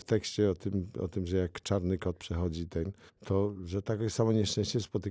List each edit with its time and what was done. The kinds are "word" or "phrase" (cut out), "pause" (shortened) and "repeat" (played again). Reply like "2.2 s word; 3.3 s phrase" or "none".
none